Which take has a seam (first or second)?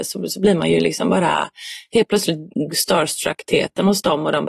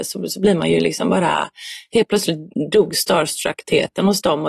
first